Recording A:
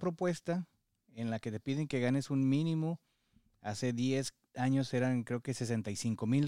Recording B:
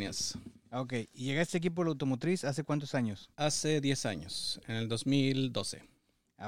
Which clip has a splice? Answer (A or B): B